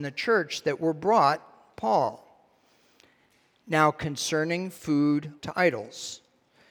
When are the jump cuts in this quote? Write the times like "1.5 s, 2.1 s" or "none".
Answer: 1.7 s, 5.4 s

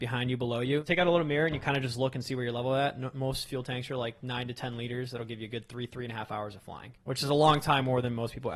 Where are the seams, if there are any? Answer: 7.0 s

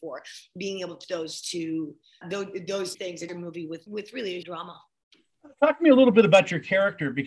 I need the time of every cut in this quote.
1.0 s, 2.2 s, 2.9 s, 3.3 s, 3.9 s, 4.4 s

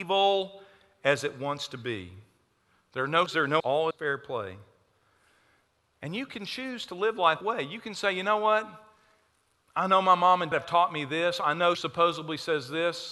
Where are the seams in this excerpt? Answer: 3.3 s, 3.6 s, 3.9 s, 7.4 s, 10.5 s, 11.7 s

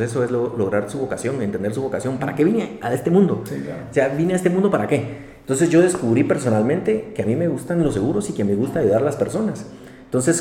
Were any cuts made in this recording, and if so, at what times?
none

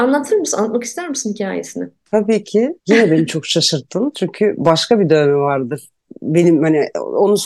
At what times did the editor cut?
2.8 s

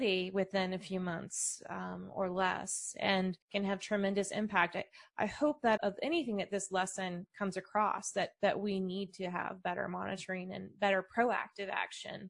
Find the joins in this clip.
3.4 s, 5.8 s

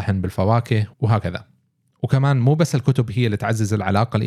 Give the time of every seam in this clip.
0.9 s

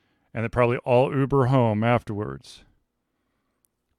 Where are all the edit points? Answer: none

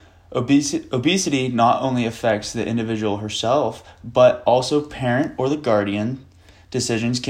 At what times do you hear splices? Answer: none

